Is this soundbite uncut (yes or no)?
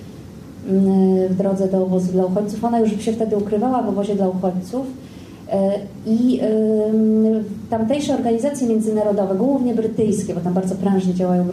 yes